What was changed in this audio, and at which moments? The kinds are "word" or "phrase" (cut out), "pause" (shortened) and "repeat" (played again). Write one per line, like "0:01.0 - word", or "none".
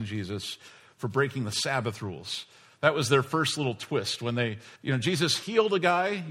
0:04.8 - pause